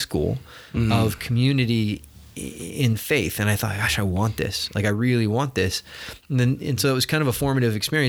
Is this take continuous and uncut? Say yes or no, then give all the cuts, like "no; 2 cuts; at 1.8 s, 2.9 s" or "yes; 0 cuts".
yes; 0 cuts